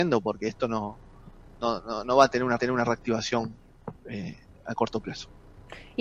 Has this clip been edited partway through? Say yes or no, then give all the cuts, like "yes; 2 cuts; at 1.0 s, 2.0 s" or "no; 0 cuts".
yes; 1 cut; at 2.6 s